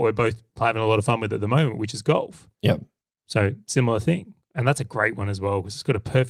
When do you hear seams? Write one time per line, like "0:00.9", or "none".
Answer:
0:02.5

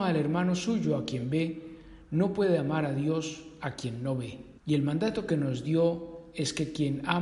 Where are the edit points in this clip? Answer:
0:04.6

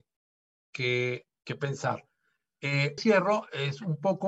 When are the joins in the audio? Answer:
0:03.0

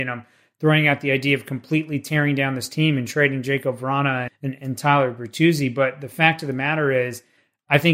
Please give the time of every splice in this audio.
0:04.3

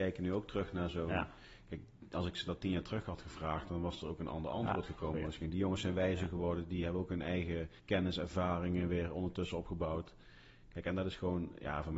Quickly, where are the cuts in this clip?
0:07.8

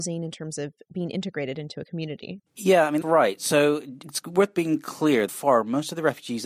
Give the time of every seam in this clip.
0:02.5
0:03.0
0:04.0
0:05.3

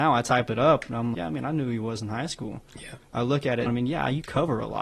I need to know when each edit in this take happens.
0:01.1
0:03.7

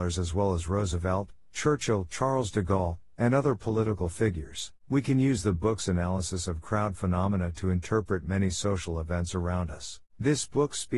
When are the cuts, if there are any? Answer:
0:04.8
0:10.1

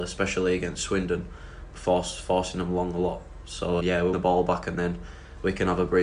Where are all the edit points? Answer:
0:01.7
0:03.8
0:04.1

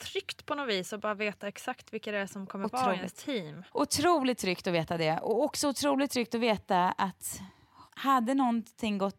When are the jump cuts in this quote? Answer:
0:03.7

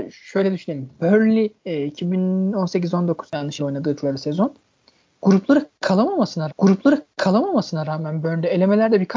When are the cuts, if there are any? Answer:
0:01.6
0:03.3
0:03.6
0:06.5

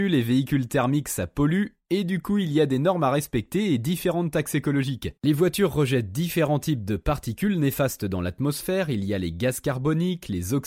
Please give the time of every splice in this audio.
0:05.2

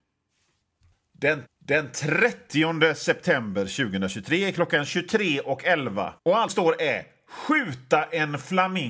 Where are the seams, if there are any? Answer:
0:01.4
0:06.2
0:06.5

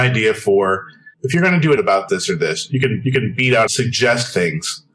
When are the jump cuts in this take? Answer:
0:01.1
0:01.8
0:02.1
0:03.0
0:03.7

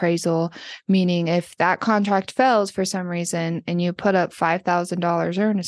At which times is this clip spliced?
none

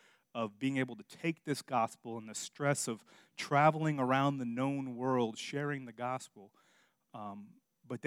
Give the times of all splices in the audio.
none

